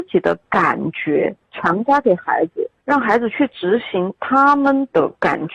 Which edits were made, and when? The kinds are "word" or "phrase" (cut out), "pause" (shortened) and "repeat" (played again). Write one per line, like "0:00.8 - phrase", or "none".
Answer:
0:01.4 - pause
0:02.8 - pause